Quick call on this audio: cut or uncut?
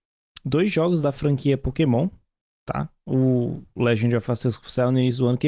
uncut